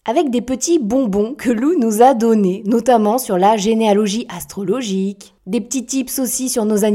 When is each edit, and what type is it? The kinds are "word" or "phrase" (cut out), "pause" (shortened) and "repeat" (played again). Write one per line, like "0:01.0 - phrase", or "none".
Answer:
none